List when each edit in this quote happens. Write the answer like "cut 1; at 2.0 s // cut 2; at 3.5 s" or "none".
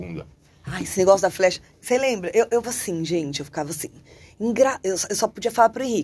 cut 1; at 2.6 s